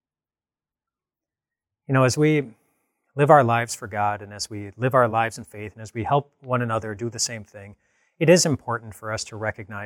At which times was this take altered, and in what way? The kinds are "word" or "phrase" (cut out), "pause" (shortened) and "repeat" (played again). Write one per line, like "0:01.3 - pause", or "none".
none